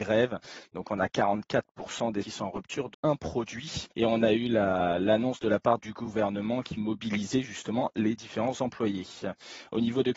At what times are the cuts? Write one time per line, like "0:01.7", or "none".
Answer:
0:02.2
0:02.9
0:03.9
0:05.8
0:06.8

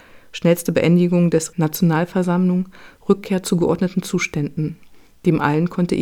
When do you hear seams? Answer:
0:01.5

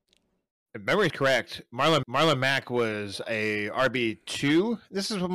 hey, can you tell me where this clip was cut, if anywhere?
0:01.1
0:02.0

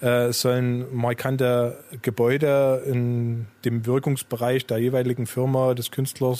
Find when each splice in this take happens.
0:03.6

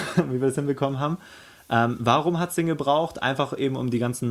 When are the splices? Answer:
none

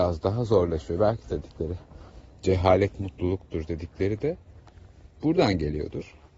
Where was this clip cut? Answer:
0:01.2

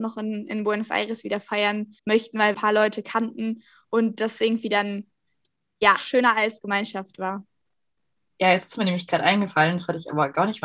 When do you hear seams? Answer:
0:02.0
0:02.5
0:06.0

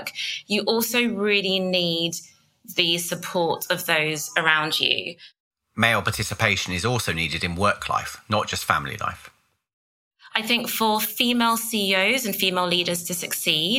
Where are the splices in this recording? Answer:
none

